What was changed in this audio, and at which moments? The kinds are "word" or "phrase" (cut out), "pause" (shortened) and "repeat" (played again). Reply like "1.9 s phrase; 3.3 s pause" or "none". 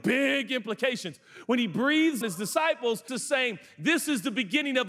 2.2 s word; 3.1 s word